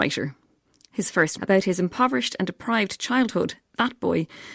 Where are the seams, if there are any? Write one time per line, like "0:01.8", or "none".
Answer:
0:01.4

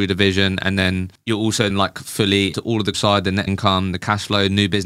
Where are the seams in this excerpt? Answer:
0:01.7
0:02.5
0:02.9
0:03.5

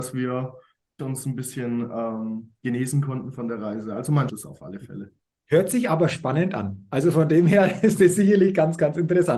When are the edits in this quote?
0:01.0
0:04.3

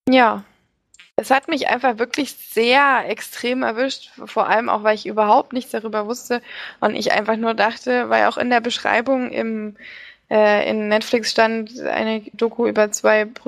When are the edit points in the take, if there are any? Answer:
0:12.3

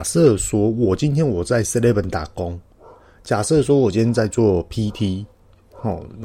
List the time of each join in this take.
none

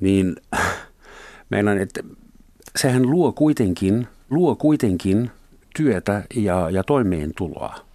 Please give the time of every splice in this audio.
0:04.3

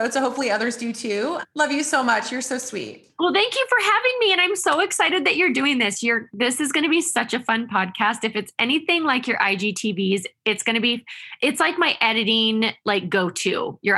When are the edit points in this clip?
none

